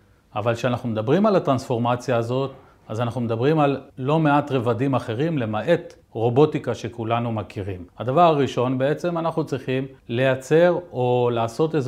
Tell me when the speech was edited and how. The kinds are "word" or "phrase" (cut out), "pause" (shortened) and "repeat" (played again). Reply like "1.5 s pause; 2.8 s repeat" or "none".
3.9 s pause; 6.0 s pause; 7.9 s pause; 10.0 s pause